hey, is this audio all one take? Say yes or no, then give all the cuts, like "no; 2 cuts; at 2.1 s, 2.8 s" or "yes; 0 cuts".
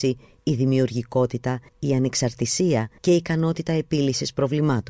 no; 2 cuts; at 1.7 s, 3.0 s